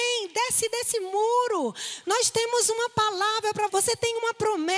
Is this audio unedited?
no; 2 cuts; at 2.0 s, 3.7 s

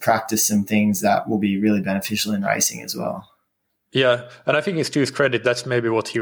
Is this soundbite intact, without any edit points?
yes; 0 cuts

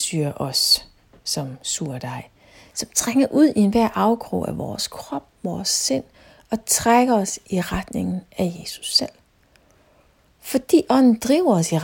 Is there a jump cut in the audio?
no; 0 cuts

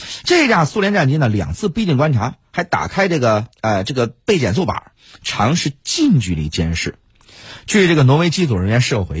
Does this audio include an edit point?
yes; 1 cut; at 3.5 s

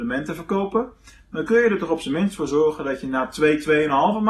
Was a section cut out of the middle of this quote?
no; 0 cuts

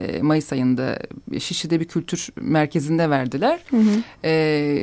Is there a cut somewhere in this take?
no; 0 cuts

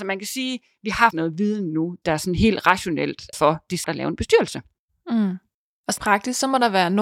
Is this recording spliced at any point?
yes; 5 cuts; at 1.1 s, 2.0 s, 3.3 s, 3.8 s, 6.0 s

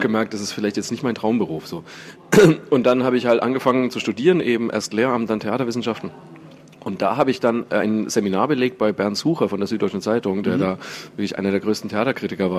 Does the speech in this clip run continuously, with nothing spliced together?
yes; 0 cuts

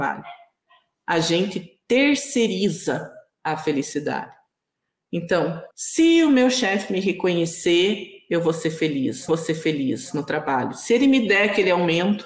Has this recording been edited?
yes; 2 cuts; at 5.7 s, 9.3 s

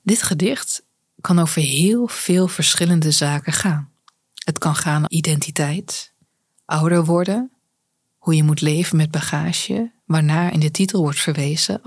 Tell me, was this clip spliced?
yes; 1 cut; at 5.1 s

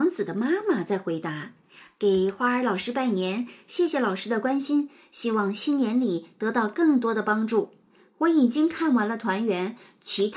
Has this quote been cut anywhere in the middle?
no; 0 cuts

